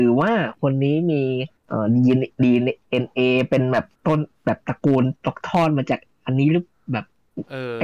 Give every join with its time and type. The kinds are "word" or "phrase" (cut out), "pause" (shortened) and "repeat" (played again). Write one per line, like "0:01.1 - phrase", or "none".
0:01.6 - pause
0:04.0 - pause
0:05.2 - pause